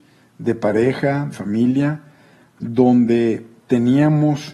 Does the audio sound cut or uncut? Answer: cut